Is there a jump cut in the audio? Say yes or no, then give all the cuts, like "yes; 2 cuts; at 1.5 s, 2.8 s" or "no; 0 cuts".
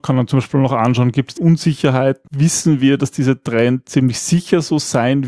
yes; 2 cuts; at 1.4 s, 2.3 s